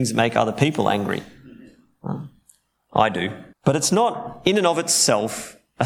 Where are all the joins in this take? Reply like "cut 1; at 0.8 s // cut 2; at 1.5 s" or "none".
cut 1; at 3.5 s